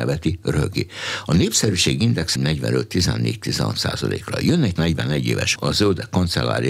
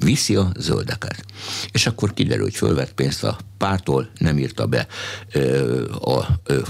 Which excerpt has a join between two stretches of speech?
first; 3 cuts; at 2.4 s, 4.8 s, 5.6 s

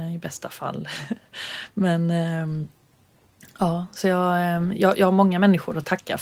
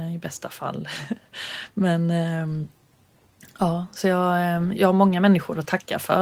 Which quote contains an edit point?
second; 1 cut; at 4.8 s

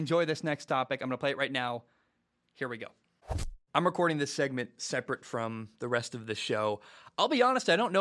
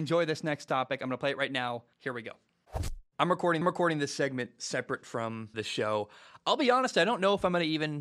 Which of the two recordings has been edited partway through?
second; 3 cuts; at 1.9 s, 3.6 s, 5.5 s

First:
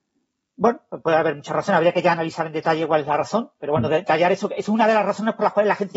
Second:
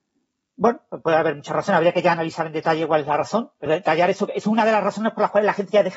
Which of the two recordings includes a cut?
second; 1 cut; at 3.7 s

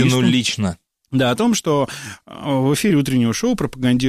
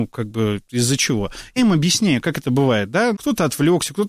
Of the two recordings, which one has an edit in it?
second; 3 cuts; at 1.6 s, 2.4 s, 3.1 s

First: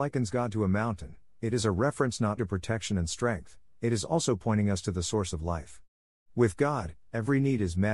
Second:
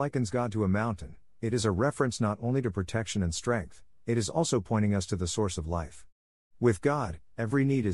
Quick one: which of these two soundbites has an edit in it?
first; 1 cut; at 2.4 s

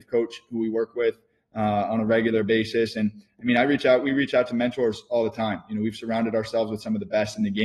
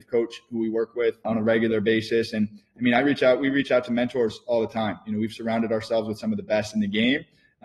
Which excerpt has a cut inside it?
second; 1 cut; at 1.2 s

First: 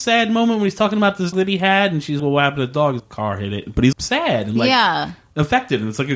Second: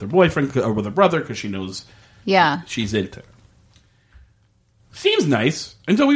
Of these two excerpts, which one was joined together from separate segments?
first; 4 cuts; at 1.3 s, 2.2 s, 3.0 s, 3.9 s

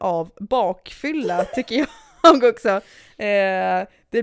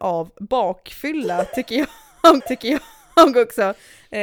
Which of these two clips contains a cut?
second; 1 cut; at 2.4 s

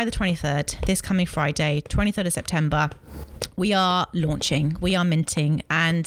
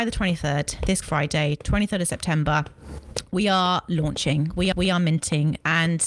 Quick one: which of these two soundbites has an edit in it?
second; 2 cuts; at 1.0 s, 4.7 s

